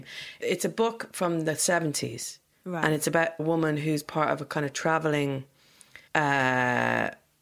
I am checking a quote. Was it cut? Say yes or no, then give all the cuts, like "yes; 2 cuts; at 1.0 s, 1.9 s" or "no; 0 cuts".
yes; 2 cuts; at 3.4 s, 6.1 s